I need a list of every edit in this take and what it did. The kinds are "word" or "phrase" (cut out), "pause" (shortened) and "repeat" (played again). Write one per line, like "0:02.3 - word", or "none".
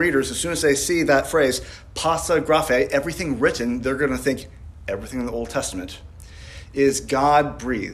none

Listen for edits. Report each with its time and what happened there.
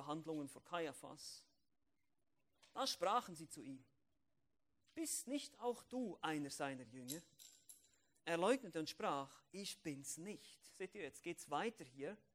none

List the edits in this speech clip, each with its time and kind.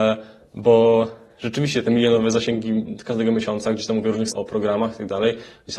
0:04.3 - word

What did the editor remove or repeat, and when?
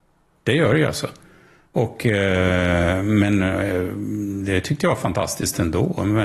none

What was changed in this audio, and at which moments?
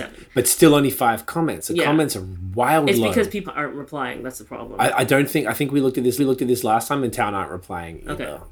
0:03.4 - word
0:06.2 - repeat

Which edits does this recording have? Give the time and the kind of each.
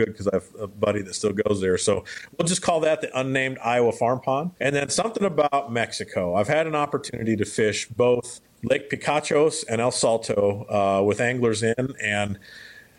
0:04.6 - pause
0:08.4 - pause

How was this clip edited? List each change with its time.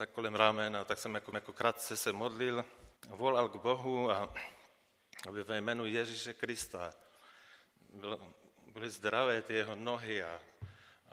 0:01.3 - repeat
0:03.0 - pause

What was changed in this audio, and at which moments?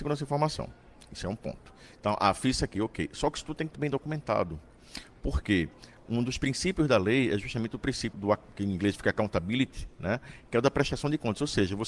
0:03.7 - word
0:08.1 - word

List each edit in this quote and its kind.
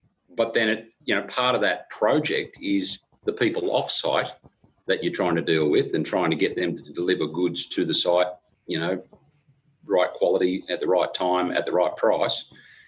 0:01.0 - pause

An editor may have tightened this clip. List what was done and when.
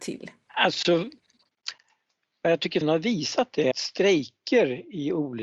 0:02.8 - word
0:03.7 - word

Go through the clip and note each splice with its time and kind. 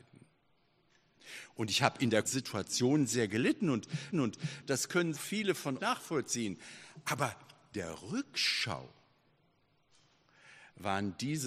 0:02.2 - word
0:04.1 - repeat
0:05.1 - phrase
0:05.8 - word
0:07.7 - word

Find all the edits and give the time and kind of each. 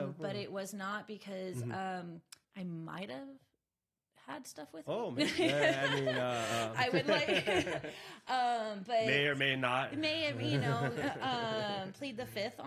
0:02.4 - pause

